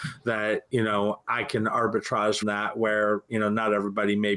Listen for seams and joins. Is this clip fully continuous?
no; 1 cut; at 2.4 s

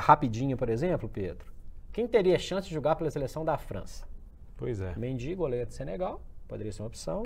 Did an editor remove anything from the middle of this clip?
no; 0 cuts

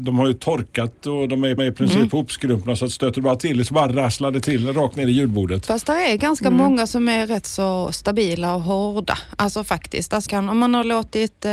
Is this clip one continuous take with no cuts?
no; 2 cuts; at 1.6 s, 10.3 s

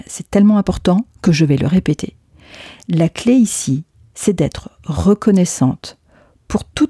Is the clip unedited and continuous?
yes; 0 cuts

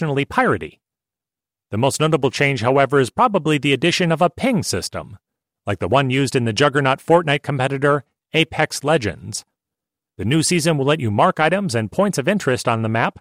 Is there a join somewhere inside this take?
no; 0 cuts

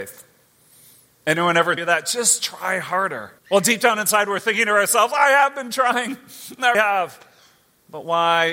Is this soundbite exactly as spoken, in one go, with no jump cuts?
no; 3 cuts; at 1.8 s, 3.4 s, 6.7 s

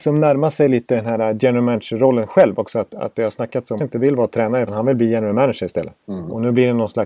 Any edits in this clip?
yes; 3 cuts; at 3.8 s, 4.7 s, 6.0 s

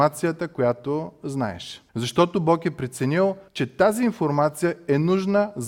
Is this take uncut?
no; 2 cuts; at 1.9 s, 3.5 s

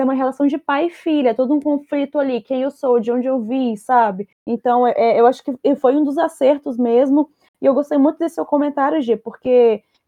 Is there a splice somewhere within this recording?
no; 0 cuts

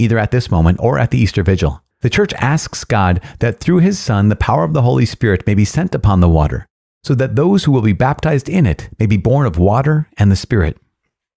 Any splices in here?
yes; 1 cut; at 1.9 s

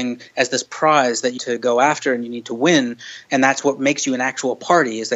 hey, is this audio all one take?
no; 1 cut; at 1.4 s

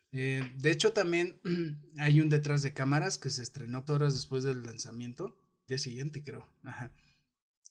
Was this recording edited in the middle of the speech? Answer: yes; 2 cuts; at 3.9 s, 5.7 s

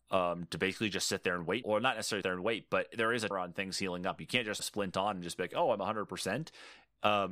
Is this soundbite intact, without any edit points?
no; 4 cuts; at 1.6 s, 2.2 s, 3.3 s, 4.6 s

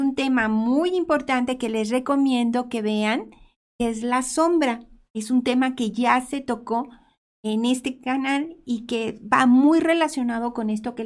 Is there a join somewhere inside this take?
no; 0 cuts

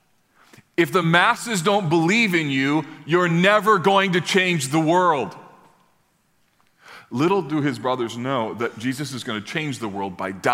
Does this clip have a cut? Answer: no; 0 cuts

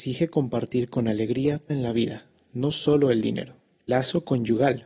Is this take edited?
yes; 2 cuts; at 1.7 s, 3.9 s

